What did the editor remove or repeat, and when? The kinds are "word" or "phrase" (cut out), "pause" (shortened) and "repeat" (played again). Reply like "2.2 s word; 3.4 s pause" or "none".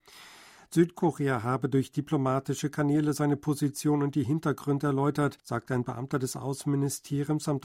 5.4 s pause